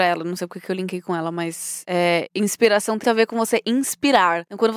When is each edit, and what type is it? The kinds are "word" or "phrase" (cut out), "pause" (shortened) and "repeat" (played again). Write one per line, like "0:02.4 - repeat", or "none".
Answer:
0:03.0 - word